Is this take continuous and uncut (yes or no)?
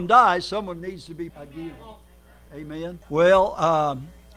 no